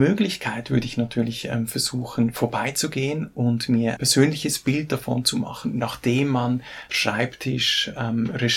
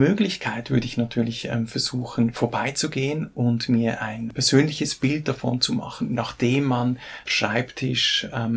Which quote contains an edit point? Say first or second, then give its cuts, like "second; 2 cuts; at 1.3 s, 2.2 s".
first; 1 cut; at 4.0 s